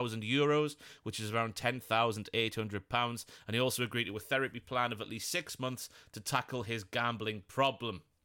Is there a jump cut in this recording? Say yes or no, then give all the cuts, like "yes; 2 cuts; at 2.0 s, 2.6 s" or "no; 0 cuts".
no; 0 cuts